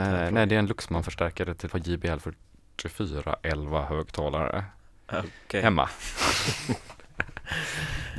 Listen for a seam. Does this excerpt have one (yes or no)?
yes